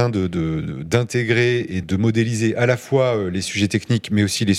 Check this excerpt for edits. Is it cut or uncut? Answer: cut